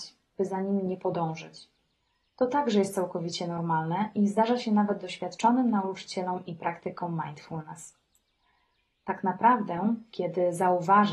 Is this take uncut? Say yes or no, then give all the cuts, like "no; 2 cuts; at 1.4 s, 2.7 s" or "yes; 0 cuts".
yes; 0 cuts